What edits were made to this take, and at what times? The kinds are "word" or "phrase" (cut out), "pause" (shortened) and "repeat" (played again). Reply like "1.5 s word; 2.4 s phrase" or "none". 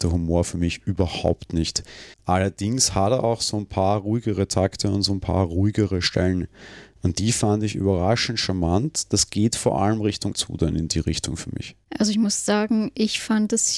2.1 s pause; 10.3 s word; 11.8 s pause